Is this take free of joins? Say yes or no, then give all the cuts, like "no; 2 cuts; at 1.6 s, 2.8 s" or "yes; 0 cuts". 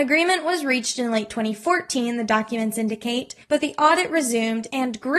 no; 1 cut; at 3.4 s